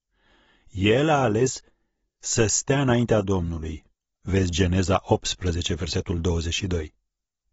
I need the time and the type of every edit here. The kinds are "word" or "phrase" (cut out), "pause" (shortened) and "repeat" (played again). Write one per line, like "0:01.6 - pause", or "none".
none

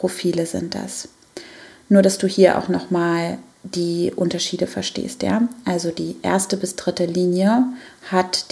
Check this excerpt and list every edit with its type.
none

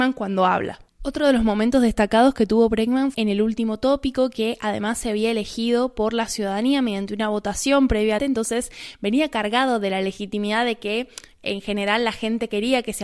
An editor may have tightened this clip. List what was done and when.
0:03.1 - word
0:08.2 - phrase

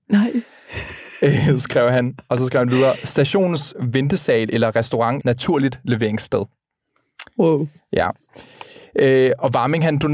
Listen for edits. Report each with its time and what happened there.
0:05.2 - word

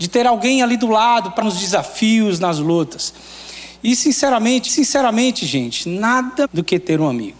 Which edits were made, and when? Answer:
0:01.4 - word
0:04.7 - repeat
0:06.4 - word

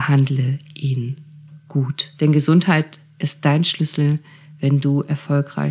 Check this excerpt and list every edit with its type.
0:02.1 - pause

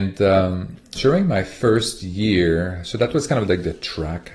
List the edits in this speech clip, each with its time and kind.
0:01.0 - word

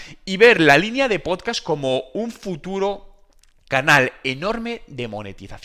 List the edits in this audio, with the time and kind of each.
none

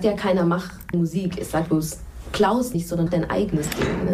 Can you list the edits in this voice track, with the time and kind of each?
0:00.9 - word
0:01.7 - word
0:02.7 - word
0:03.1 - word

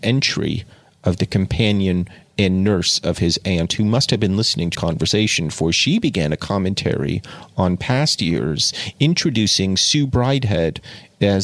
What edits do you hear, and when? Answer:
0:04.7 - word

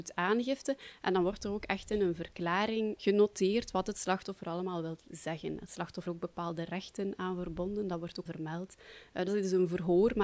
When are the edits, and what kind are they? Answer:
0:06.1 - phrase
0:08.3 - word
0:09.3 - word

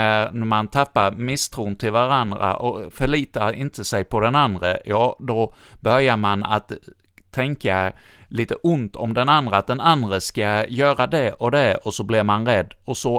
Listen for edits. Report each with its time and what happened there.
none

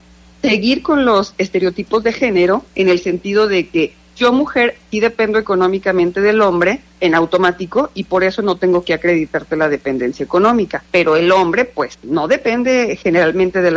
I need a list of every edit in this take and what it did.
0:10.8 - pause

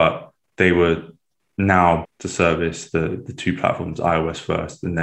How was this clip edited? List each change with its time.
0:02.0 - phrase

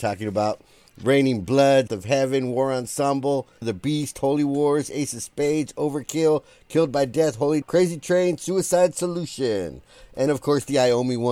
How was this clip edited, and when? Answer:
0:01.9 - word
0:03.6 - word
0:07.6 - word
0:10.3 - word

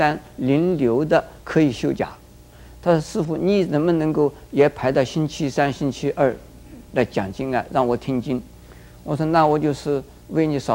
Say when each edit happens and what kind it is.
0:01.4 - pause
0:08.5 - pause

